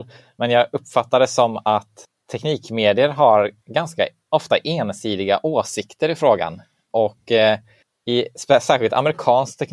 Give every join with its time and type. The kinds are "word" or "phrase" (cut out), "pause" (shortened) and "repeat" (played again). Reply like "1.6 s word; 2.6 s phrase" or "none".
none